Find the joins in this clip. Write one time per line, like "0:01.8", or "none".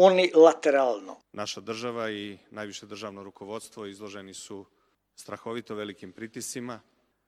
none